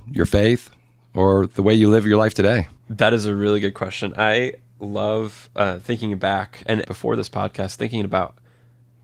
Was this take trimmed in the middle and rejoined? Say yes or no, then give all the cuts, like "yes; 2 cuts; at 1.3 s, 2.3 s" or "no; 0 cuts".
yes; 2 cuts; at 2.8 s, 6.8 s